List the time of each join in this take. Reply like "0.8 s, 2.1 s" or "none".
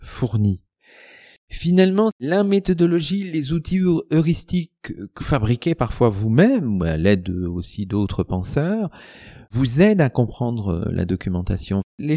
5.2 s